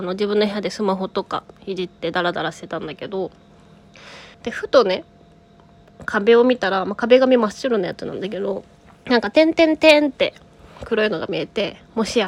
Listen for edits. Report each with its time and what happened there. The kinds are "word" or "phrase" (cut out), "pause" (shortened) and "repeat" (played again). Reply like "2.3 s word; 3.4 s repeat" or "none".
1.5 s pause; 4.3 s pause; 8.7 s pause